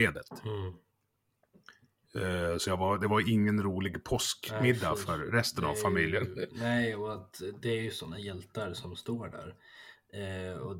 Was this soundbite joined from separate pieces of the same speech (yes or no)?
no